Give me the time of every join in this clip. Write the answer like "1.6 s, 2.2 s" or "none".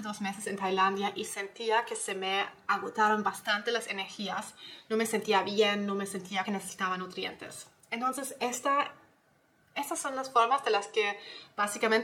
6.4 s